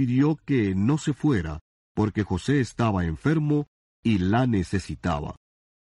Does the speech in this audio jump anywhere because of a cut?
no; 0 cuts

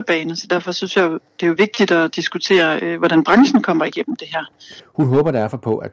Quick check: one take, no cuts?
yes; 0 cuts

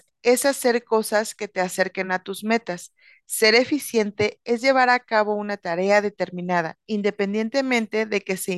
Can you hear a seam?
no; 0 cuts

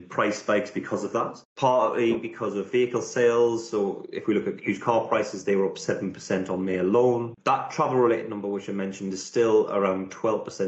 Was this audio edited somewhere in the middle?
no; 0 cuts

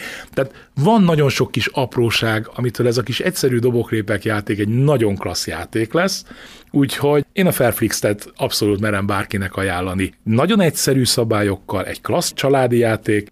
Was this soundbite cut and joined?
no; 0 cuts

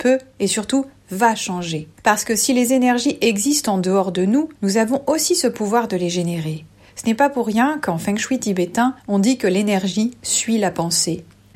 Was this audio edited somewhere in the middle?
yes; 3 cuts; at 2.0 s, 4.6 s, 9.0 s

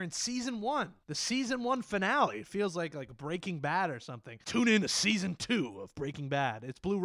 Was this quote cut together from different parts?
no; 0 cuts

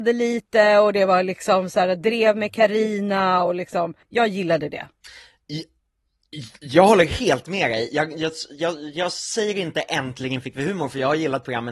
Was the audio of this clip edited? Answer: yes; 1 cut; at 4.0 s

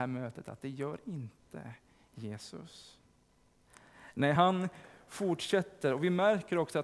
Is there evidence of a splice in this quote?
no; 0 cuts

